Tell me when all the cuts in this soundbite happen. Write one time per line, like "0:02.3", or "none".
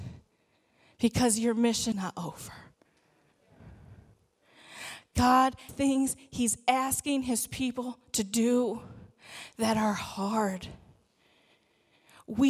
0:01.9
0:05.7